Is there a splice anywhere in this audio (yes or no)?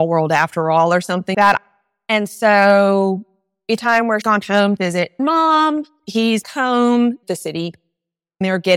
yes